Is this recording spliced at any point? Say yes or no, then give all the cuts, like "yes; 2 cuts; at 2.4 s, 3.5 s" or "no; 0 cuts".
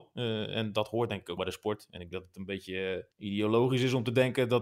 yes; 3 cuts; at 1.4 s, 2.1 s, 3.1 s